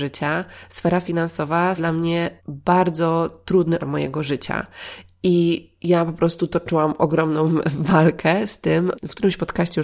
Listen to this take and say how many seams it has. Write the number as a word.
four